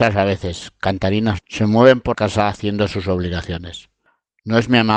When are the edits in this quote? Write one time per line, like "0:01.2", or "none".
0:01.4
0:02.1

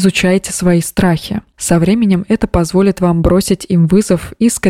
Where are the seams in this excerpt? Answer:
none

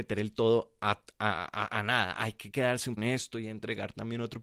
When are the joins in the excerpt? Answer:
0:03.0

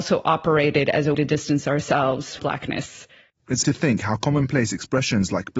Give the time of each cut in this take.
0:01.1
0:02.4
0:03.6

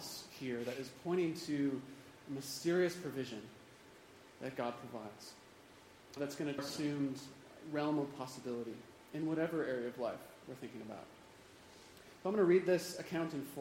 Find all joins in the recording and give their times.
0:06.2
0:06.6

